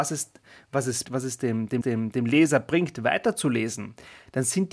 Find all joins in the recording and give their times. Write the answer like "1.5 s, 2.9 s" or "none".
1.0 s, 1.8 s